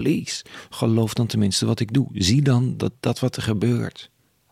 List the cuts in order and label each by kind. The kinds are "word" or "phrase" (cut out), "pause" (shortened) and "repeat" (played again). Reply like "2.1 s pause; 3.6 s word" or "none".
none